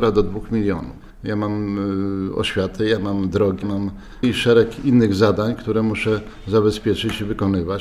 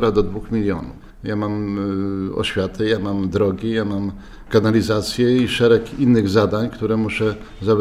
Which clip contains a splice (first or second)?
first